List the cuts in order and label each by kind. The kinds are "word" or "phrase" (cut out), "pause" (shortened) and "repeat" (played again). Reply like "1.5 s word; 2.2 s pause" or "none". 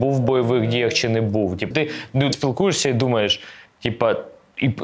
1.7 s word; 2.3 s word; 3.7 s pause